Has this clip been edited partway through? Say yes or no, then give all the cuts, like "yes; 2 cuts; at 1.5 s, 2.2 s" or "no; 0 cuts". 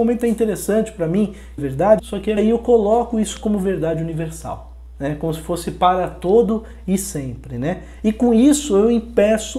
yes; 3 cuts; at 1.6 s, 2.0 s, 2.4 s